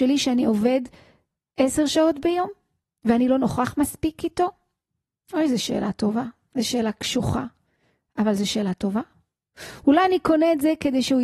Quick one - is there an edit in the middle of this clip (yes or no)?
no